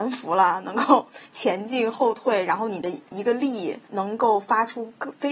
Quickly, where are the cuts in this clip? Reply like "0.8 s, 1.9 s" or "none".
3.8 s